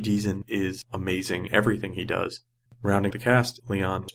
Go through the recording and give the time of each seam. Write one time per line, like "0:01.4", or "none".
0:01.5
0:03.1